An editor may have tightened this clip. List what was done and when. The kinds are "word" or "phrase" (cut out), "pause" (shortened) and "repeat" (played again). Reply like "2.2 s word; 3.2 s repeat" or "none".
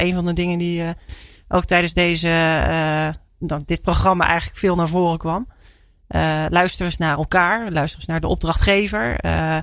none